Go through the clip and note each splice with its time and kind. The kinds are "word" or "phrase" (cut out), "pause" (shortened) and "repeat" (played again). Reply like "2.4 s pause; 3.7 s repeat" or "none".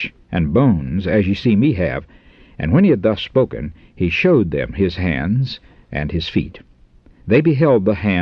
none

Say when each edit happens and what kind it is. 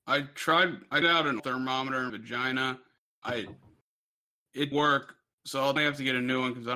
1.0 s word; 1.4 s word; 2.1 s word; 3.2 s word; 4.7 s word; 5.8 s word

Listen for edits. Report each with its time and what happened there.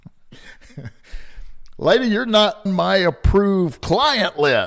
2.7 s word

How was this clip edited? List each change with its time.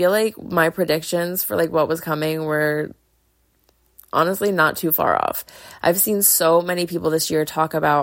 none

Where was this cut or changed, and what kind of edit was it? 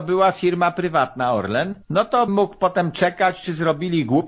1.8 s pause; 2.3 s word

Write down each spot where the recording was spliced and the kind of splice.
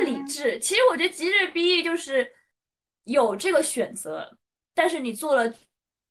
none

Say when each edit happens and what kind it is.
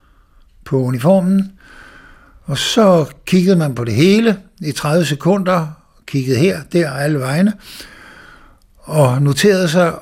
none

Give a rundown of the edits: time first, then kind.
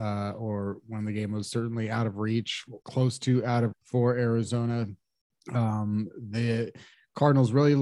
2.8 s pause; 3.7 s word; 5.3 s pause

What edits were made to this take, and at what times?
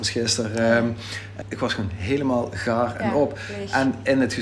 1.4 s word

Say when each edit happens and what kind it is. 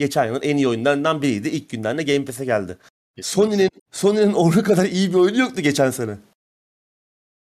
3.8 s pause

